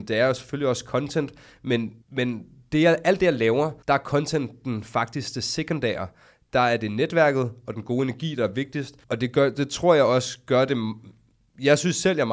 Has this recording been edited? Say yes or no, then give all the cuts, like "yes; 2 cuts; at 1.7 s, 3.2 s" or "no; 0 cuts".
yes; 3 cuts; at 2.0 s, 3.8 s, 9.0 s